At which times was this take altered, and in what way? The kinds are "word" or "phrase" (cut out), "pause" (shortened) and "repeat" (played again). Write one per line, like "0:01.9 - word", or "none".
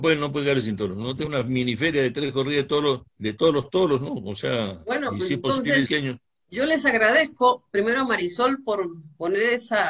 0:01.3 - phrase
0:03.1 - pause
0:05.9 - word